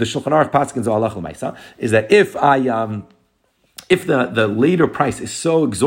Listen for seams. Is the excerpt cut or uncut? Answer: uncut